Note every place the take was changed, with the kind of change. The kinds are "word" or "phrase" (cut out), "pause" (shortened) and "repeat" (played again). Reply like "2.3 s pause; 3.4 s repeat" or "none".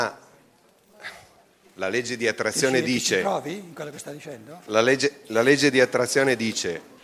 none